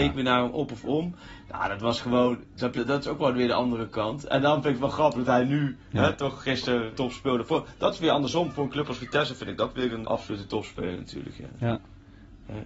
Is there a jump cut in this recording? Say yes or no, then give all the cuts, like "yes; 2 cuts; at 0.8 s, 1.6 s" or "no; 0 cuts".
yes; 3 cuts; at 2.8 s, 6.9 s, 10.0 s